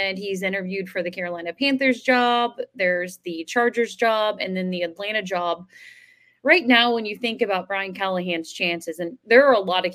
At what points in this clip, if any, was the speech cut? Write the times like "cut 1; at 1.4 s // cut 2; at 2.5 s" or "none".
none

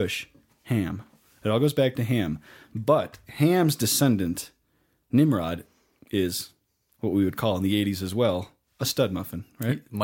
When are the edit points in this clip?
none

